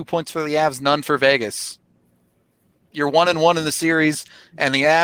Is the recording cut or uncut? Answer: uncut